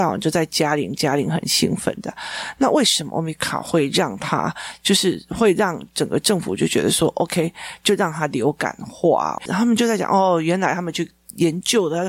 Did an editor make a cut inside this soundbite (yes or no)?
no